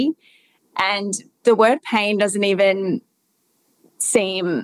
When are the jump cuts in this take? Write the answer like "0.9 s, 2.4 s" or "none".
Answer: none